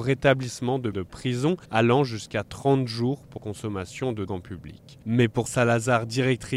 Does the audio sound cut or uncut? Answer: cut